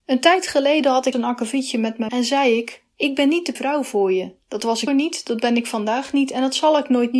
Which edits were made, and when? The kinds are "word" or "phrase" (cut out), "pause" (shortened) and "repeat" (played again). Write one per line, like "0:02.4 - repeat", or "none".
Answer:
0:01.1 - word
0:02.1 - word
0:03.6 - word
0:04.9 - word